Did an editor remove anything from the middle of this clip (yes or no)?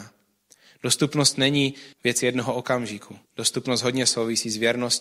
yes